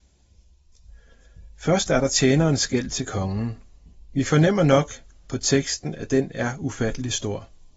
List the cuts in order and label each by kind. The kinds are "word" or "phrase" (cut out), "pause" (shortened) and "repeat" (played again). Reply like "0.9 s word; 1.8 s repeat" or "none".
none